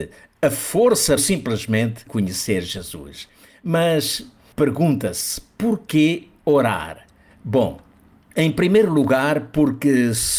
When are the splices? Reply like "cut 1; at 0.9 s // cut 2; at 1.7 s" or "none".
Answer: cut 1; at 1.2 s // cut 2; at 2.1 s